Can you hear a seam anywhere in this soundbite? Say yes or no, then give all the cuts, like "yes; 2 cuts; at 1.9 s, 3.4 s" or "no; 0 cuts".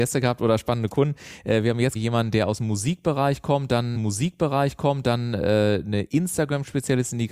yes; 2 cuts; at 2.0 s, 4.0 s